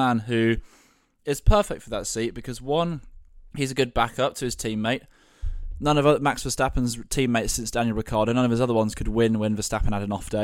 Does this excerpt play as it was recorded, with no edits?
no; 1 cut; at 3.5 s

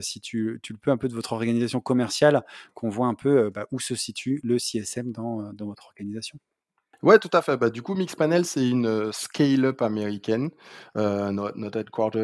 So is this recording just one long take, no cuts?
yes; 0 cuts

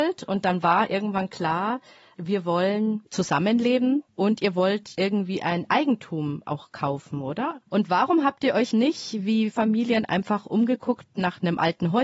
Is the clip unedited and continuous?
no; 3 cuts; at 4.1 s, 8.7 s, 9.5 s

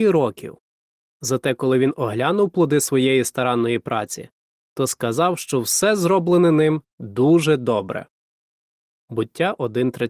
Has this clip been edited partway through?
no; 0 cuts

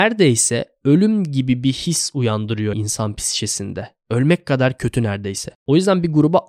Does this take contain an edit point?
yes; 1 cut; at 2.7 s

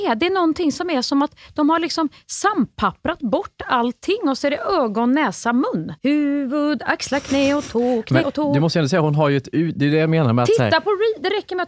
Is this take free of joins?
no; 2 cuts; at 6.0 s, 8.2 s

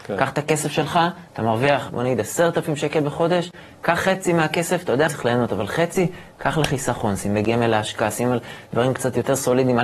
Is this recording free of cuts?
no; 3 cuts; at 1.3 s, 1.9 s, 5.1 s

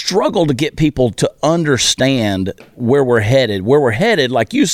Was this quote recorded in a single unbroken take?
yes; 0 cuts

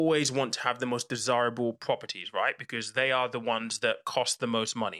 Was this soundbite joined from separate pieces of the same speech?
no; 0 cuts

